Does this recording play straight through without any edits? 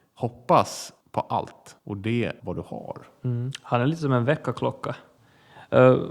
no; 3 cuts; at 1.0 s, 1.8 s, 2.4 s

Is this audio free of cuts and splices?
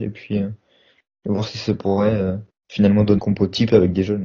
no; 2 cuts; at 2.5 s, 3.2 s

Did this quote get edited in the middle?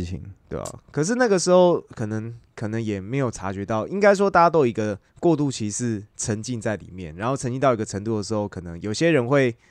yes; 1 cut; at 5.1 s

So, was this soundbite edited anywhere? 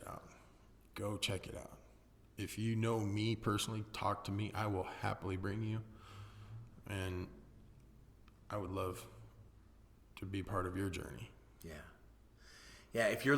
no; 0 cuts

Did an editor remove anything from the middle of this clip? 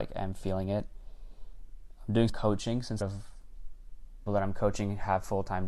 yes; 3 cuts; at 2.3 s, 3.0 s, 4.3 s

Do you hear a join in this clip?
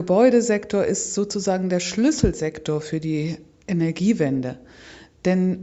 no; 0 cuts

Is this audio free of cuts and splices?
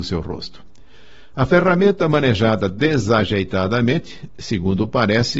yes; 0 cuts

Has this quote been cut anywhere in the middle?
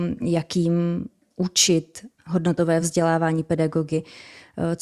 no; 0 cuts

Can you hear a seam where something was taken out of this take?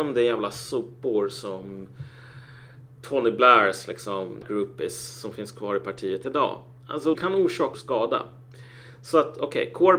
yes; 3 cuts; at 4.4 s, 7.1 s, 7.7 s

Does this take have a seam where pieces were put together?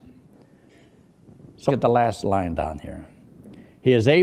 yes; 1 cut; at 1.7 s

